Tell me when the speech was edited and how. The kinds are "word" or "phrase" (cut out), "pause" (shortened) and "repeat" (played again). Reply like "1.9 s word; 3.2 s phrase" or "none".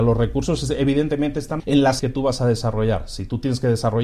1.6 s word; 2.0 s word